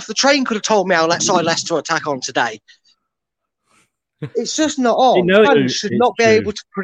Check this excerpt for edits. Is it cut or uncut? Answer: cut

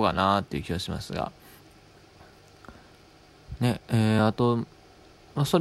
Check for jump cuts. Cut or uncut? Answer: uncut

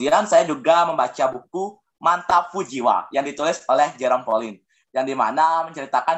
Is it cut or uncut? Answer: uncut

